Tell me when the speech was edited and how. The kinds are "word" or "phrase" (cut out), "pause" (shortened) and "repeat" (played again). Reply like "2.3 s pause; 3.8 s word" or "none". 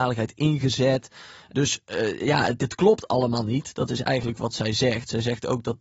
none